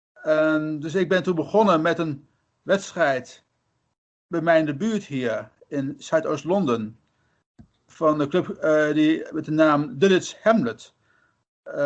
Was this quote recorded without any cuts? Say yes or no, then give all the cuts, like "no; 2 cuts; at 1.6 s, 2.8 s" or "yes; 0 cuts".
yes; 0 cuts